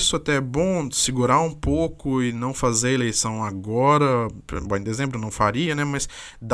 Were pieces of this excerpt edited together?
no; 0 cuts

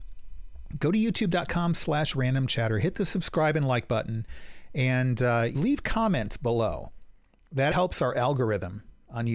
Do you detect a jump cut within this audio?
yes; 2 cuts; at 5.5 s, 7.7 s

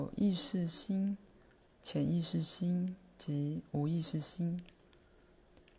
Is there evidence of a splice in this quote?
no; 0 cuts

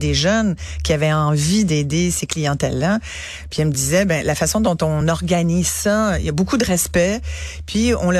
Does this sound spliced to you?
no; 0 cuts

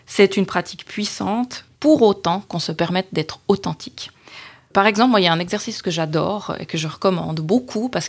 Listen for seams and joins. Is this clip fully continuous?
no; 1 cut; at 1.7 s

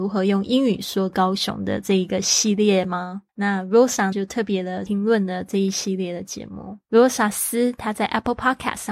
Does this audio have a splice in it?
yes; 3 cuts; at 3.3 s, 4.1 s, 6.8 s

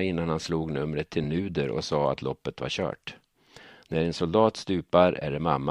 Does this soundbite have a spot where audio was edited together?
no; 0 cuts

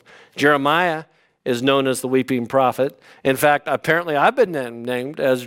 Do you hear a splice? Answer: no; 0 cuts

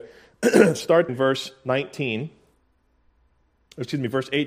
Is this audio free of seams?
no; 1 cut; at 1.1 s

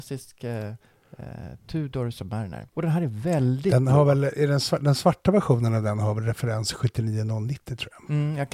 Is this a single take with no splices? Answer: no; 1 cut; at 2.7 s

